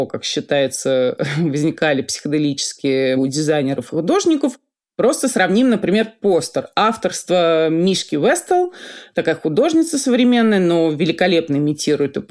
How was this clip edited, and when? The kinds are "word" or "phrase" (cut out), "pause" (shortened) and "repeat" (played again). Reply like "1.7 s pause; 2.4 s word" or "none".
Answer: 3.2 s word